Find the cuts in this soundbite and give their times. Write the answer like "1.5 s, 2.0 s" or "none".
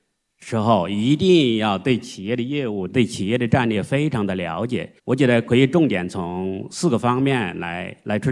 5.0 s